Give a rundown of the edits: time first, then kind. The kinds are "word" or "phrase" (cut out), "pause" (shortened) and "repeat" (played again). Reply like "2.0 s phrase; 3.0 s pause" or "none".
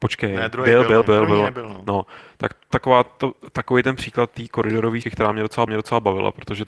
1.0 s word; 2.7 s phrase; 5.0 s word; 5.7 s repeat